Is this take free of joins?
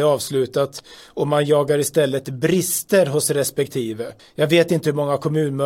no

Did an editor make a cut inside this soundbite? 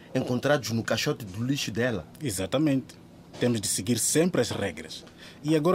no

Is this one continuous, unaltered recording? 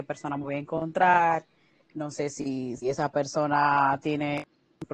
yes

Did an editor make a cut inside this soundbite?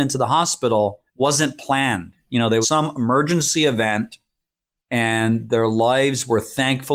yes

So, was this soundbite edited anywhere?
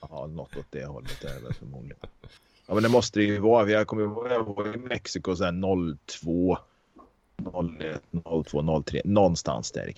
yes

